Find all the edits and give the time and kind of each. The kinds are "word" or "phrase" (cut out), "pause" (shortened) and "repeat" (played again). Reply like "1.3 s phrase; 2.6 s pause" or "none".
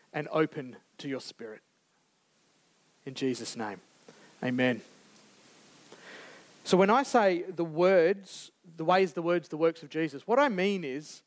none